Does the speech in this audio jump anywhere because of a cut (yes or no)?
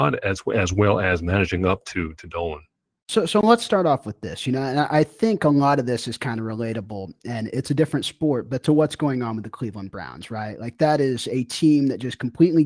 no